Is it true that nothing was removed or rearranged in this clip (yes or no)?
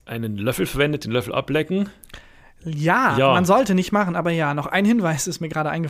yes